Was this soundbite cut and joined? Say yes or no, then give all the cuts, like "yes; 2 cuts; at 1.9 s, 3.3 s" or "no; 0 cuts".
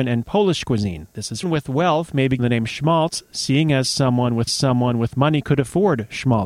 yes; 3 cuts; at 1.4 s, 2.4 s, 4.5 s